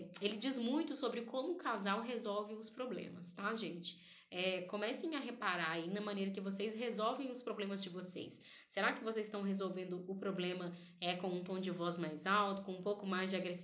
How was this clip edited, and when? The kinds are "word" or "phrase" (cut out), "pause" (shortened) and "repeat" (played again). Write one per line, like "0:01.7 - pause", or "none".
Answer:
none